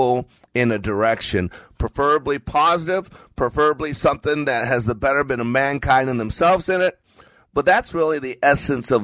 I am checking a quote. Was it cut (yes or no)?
no